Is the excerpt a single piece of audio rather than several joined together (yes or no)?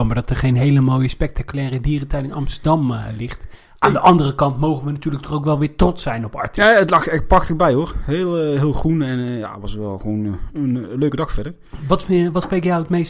yes